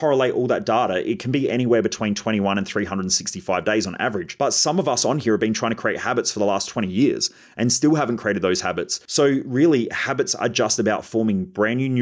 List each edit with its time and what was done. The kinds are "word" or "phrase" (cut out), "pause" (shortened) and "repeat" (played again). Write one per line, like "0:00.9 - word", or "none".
none